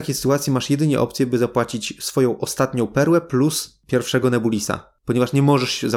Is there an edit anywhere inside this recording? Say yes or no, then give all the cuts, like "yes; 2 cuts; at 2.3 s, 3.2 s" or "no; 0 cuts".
no; 0 cuts